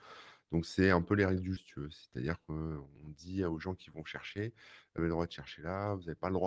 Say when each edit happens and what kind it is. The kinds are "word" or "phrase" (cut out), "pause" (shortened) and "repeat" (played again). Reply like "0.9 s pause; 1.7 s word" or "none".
1.6 s word; 2.9 s pause; 5.0 s phrase